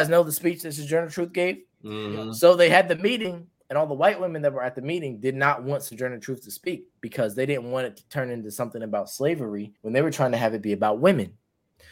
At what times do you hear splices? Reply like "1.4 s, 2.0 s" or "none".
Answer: 1.7 s, 9.8 s